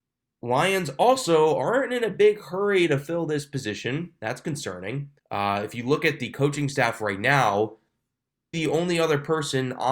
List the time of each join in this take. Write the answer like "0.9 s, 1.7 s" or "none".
5.2 s, 8.5 s